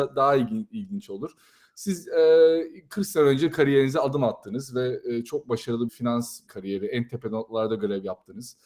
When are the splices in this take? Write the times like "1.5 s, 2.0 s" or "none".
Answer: 5.9 s, 6.5 s